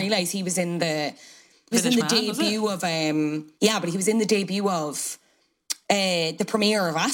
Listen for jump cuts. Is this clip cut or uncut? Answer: cut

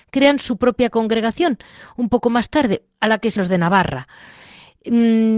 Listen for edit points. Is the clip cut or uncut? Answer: cut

